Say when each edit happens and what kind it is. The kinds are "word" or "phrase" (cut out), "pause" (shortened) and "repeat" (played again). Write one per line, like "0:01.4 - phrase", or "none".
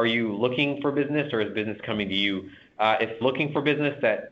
0:03.2 - word